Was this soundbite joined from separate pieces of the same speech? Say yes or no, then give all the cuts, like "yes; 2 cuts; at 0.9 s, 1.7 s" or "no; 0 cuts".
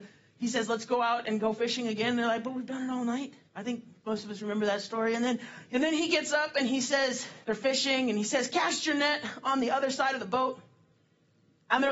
yes; 2 cuts; at 3.5 s, 7.4 s